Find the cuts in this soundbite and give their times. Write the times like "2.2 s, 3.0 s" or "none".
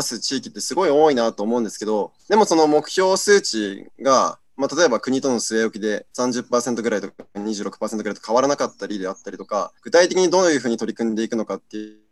2.2 s, 6.1 s, 9.8 s